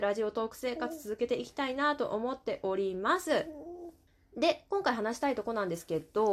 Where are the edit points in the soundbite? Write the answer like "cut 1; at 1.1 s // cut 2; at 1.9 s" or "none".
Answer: cut 1; at 4.1 s